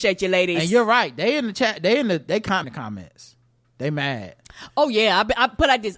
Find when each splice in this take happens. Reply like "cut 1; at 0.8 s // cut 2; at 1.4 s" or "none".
cut 1; at 2.6 s

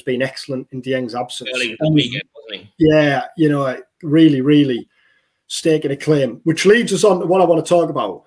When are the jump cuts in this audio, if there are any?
cut 1; at 1.8 s

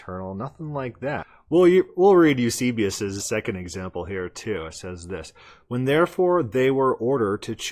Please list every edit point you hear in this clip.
cut 1; at 3.2 s

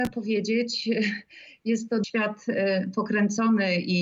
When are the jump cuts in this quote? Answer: cut 1; at 2.0 s

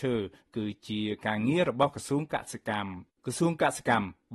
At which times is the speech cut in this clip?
cut 1; at 3.1 s

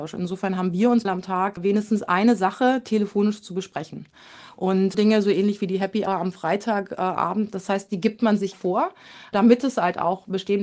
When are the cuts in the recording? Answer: cut 1; at 1.0 s // cut 2; at 4.9 s // cut 3; at 6.1 s // cut 4; at 8.5 s

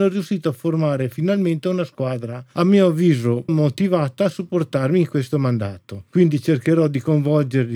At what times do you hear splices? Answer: cut 1; at 3.5 s

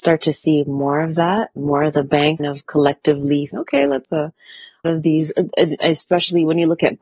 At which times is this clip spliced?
cut 1; at 1.6 s // cut 2; at 2.4 s // cut 3; at 3.5 s // cut 4; at 4.0 s // cut 5; at 4.8 s

